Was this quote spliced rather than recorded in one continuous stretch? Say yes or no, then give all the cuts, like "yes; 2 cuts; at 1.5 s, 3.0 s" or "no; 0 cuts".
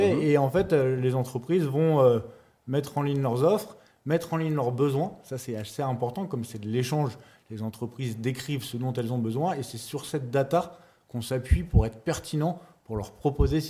no; 0 cuts